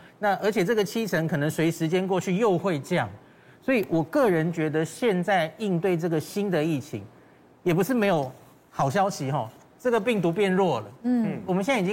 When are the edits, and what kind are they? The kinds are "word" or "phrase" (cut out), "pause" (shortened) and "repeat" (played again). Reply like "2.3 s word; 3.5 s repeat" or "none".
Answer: none